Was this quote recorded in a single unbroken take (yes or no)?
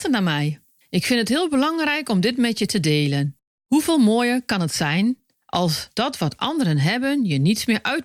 yes